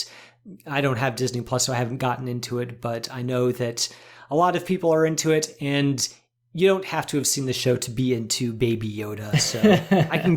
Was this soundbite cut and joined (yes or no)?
no